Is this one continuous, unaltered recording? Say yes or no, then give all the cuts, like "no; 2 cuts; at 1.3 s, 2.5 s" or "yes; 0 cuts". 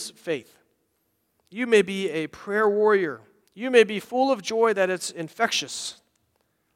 no; 1 cut; at 3.4 s